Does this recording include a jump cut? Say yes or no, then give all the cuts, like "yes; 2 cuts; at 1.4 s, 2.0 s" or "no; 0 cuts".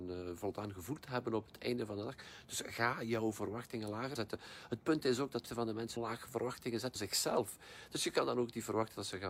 yes; 4 cuts; at 4.2 s, 5.5 s, 6.0 s, 7.0 s